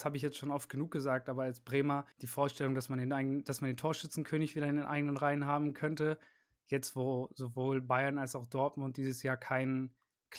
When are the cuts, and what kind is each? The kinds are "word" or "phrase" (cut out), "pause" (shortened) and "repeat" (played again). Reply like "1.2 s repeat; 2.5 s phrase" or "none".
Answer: 2.1 s pause